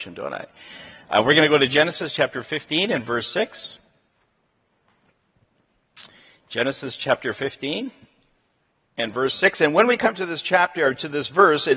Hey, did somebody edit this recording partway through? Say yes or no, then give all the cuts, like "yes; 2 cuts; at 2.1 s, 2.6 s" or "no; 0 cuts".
no; 0 cuts